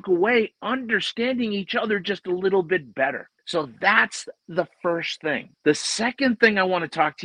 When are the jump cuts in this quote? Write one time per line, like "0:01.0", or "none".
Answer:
0:03.4
0:05.5